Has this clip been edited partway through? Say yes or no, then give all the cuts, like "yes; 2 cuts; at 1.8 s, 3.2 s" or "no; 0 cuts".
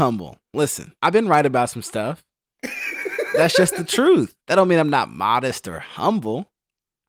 yes; 2 cuts; at 1.0 s, 4.4 s